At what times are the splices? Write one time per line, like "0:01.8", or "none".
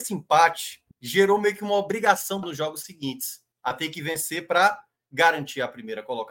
0:00.9
0:02.4
0:03.5